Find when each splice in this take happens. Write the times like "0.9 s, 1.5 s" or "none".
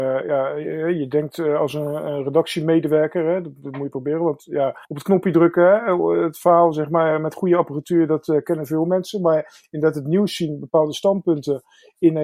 4.8 s